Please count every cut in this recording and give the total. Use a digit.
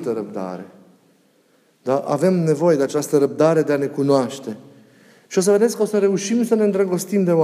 0